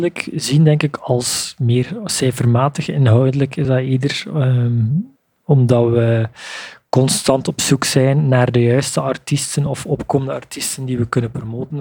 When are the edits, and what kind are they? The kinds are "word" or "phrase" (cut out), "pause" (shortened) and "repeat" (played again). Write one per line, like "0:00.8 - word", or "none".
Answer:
none